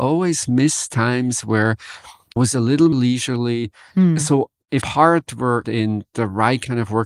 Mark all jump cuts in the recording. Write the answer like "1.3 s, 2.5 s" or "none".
0.9 s, 2.4 s, 2.9 s, 4.8 s, 5.6 s